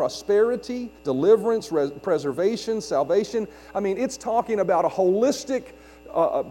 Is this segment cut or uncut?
cut